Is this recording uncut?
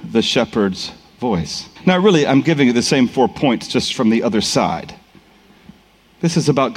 no; 1 cut; at 1.8 s

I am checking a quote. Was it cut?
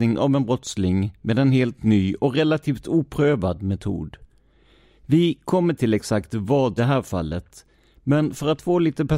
yes; 1 cut; at 6.8 s

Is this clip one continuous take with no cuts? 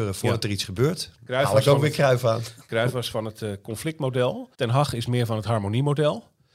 no; 1 cut; at 4.5 s

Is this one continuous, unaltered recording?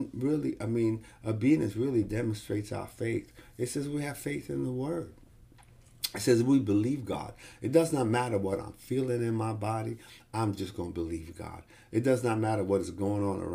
yes; 0 cuts

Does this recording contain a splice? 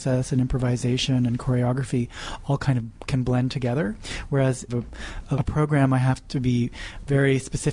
yes; 2 cuts; at 4.7 s, 5.4 s

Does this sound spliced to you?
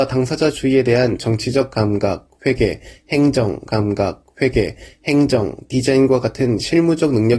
yes; 1 cut; at 3.7 s

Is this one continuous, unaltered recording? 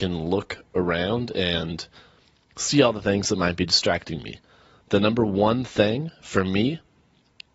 yes; 0 cuts

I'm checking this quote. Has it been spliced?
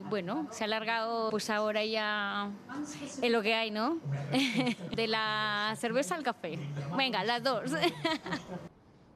yes; 1 cut; at 1.3 s

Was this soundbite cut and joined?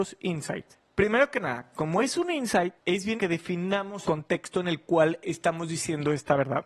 yes; 3 cuts; at 2.8 s, 3.2 s, 4.0 s

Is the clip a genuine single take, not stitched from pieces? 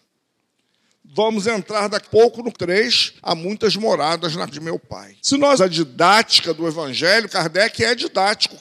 no; 7 cuts; at 2.0 s, 2.5 s, 3.2 s, 4.5 s, 5.2 s, 5.6 s, 7.3 s

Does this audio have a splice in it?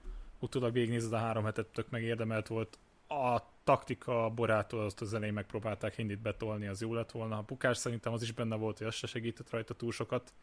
no; 0 cuts

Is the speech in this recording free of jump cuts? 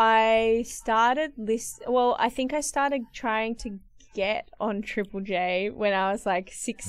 yes; 0 cuts

